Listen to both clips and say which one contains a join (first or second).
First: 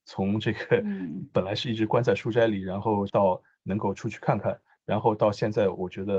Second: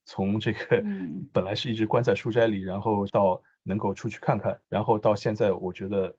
second